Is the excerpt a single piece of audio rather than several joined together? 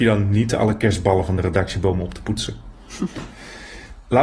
yes; 0 cuts

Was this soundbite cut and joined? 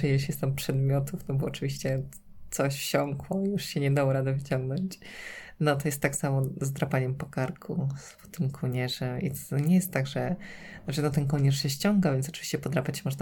no; 0 cuts

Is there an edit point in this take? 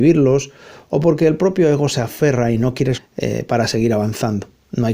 yes; 1 cut; at 2.9 s

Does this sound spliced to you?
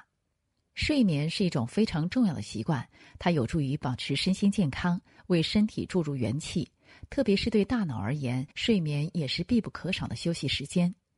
yes; 1 cut; at 8.5 s

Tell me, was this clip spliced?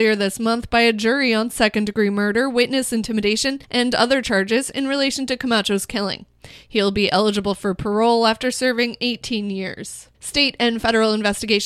yes; 2 cuts; at 3.6 s, 10.1 s

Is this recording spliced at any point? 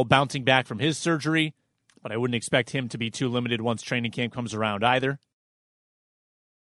no; 0 cuts

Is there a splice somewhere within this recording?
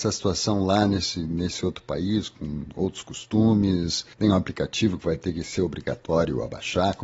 yes; 1 cut; at 4.1 s

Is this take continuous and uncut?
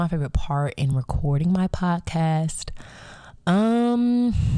yes; 0 cuts

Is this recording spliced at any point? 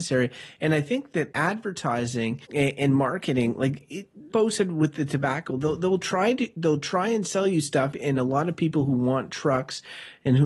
yes; 5 cuts; at 1.3 s, 2.4 s, 4.3 s, 5.5 s, 7.9 s

